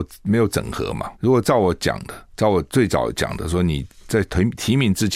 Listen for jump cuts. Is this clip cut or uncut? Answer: cut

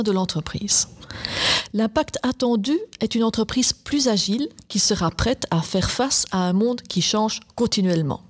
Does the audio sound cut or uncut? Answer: uncut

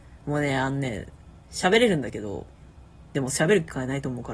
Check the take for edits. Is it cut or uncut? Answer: cut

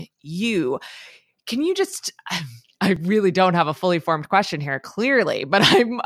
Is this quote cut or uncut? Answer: uncut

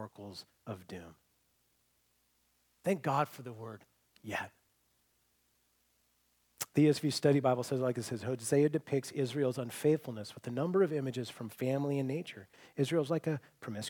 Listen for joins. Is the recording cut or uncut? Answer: uncut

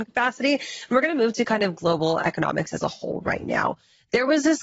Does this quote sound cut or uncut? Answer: uncut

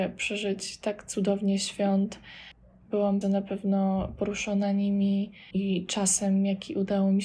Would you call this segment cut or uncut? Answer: cut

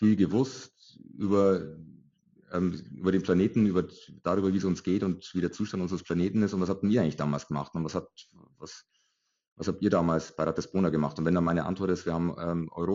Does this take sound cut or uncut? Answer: uncut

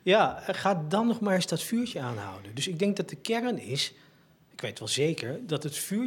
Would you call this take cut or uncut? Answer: uncut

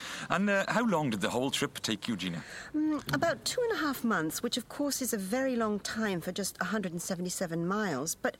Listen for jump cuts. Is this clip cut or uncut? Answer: uncut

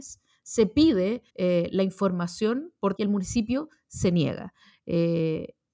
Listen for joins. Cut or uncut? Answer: cut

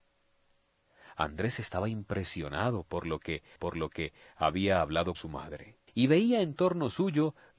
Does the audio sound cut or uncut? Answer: cut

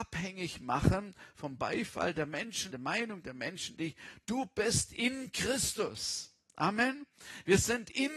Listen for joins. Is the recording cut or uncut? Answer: cut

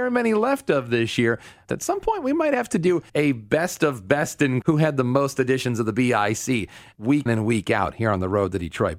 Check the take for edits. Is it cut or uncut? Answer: cut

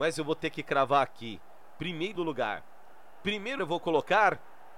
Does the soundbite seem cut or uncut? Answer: cut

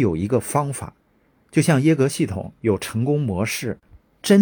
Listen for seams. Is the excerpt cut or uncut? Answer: cut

